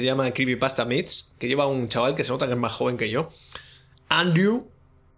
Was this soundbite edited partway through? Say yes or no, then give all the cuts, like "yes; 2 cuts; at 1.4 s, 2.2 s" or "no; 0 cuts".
no; 0 cuts